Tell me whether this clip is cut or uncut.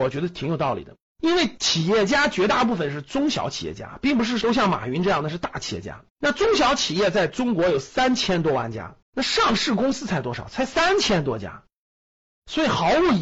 cut